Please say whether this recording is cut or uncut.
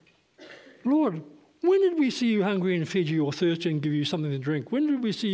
uncut